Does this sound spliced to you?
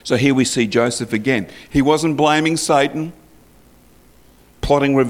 no; 0 cuts

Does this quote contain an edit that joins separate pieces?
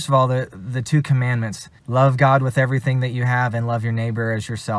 yes; 1 cut; at 1.8 s

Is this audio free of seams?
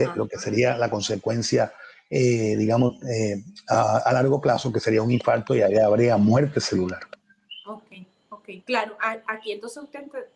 no; 1 cut; at 8.6 s

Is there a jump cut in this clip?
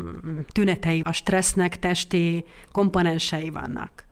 yes; 1 cut; at 1.0 s

